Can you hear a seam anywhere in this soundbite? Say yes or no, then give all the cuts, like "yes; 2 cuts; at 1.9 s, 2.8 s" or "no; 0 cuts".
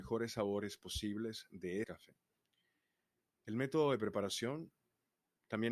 yes; 1 cut; at 1.8 s